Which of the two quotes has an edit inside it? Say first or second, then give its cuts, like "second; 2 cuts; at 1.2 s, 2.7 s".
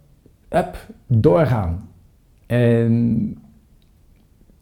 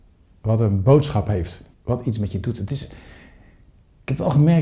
second; 1 cut; at 1.7 s